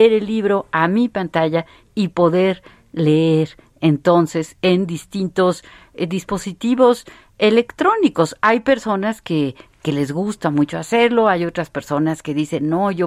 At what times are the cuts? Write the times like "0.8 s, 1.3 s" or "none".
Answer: none